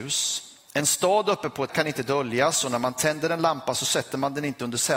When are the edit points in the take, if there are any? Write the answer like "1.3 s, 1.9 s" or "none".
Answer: 1.7 s